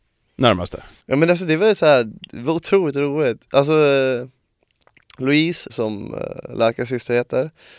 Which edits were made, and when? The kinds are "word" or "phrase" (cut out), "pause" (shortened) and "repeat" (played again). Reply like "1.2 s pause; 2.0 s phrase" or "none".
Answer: 1.0 s pause; 5.7 s word